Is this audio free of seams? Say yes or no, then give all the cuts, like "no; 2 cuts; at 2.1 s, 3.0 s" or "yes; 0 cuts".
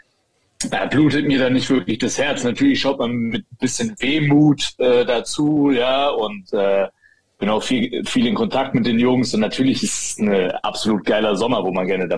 yes; 0 cuts